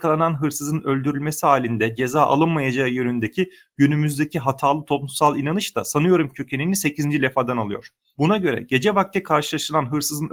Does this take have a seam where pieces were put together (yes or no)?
no